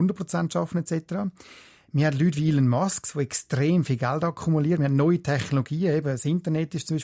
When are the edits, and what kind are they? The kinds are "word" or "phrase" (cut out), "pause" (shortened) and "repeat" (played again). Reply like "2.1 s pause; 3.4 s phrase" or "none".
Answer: none